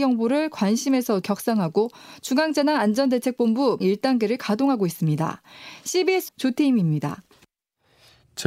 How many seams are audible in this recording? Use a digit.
3